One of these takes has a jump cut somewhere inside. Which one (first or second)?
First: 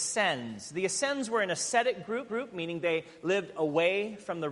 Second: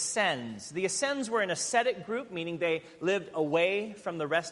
first